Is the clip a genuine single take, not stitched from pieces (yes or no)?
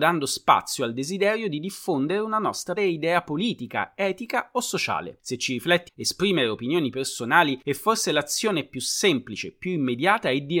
no